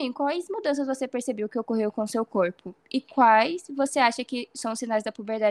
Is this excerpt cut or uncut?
uncut